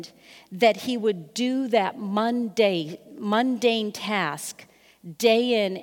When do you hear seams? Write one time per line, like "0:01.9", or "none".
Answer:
none